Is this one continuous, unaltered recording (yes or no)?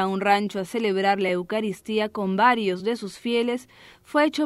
yes